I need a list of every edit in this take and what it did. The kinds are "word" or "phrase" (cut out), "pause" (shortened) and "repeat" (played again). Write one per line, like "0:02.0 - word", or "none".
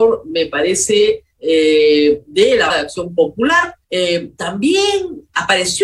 0:01.3 - pause
0:02.7 - word
0:03.8 - pause